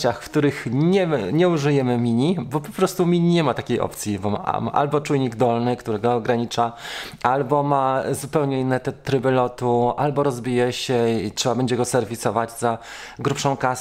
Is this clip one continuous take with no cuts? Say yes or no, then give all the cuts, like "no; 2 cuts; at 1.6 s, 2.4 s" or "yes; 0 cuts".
yes; 0 cuts